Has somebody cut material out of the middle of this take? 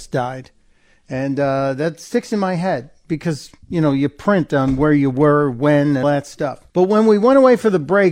yes; 2 cuts; at 6.0 s, 6.7 s

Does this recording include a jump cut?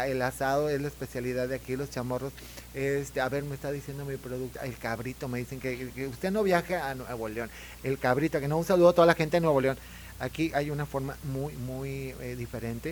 no; 0 cuts

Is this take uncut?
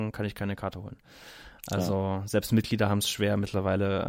yes; 0 cuts

